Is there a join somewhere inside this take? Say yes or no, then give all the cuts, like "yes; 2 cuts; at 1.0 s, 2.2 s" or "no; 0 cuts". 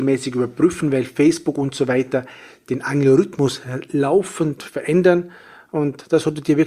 no; 0 cuts